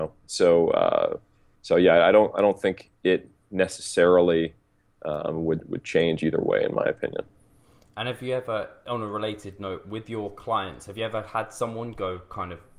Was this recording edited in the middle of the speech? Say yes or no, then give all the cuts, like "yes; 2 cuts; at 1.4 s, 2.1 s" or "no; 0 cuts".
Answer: no; 0 cuts